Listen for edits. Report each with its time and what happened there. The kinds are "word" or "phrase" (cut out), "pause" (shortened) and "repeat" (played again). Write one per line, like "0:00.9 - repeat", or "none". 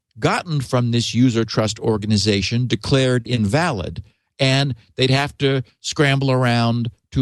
none